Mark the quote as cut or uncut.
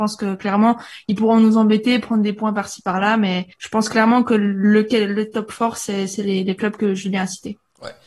cut